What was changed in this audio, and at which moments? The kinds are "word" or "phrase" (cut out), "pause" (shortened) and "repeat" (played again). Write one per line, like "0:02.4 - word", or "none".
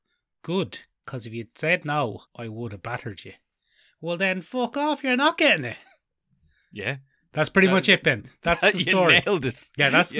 0:02.3 - pause

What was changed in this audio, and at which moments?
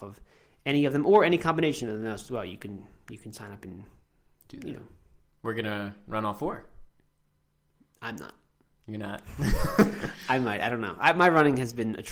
none

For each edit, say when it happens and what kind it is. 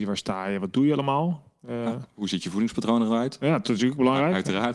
none

